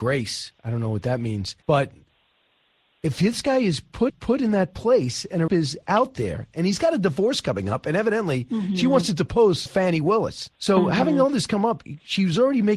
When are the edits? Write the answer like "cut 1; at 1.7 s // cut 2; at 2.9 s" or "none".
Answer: cut 1; at 1.6 s // cut 2; at 4.1 s // cut 3; at 5.5 s // cut 4; at 9.7 s // cut 5; at 10.5 s